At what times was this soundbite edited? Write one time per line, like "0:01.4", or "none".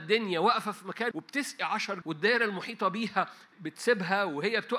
0:01.1
0:02.0
0:03.5